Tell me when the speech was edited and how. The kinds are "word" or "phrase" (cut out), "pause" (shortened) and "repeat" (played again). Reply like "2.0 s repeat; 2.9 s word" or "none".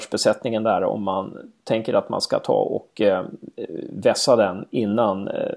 none